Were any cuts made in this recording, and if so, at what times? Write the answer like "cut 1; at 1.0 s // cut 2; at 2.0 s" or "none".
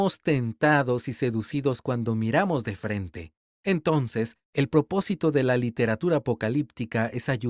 cut 1; at 4.4 s